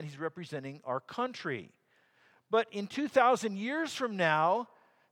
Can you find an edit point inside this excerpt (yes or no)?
no